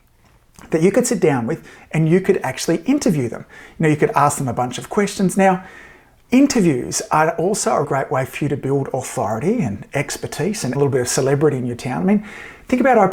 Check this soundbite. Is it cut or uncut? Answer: cut